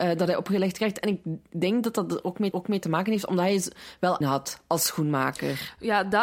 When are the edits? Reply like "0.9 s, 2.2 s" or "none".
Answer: 2.5 s, 4.2 s